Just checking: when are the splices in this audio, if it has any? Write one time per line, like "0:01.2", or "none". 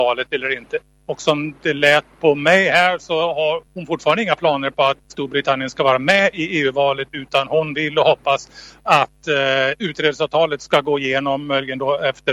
0:03.7
0:05.0